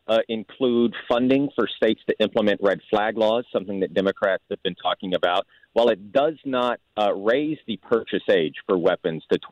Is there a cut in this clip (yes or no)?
no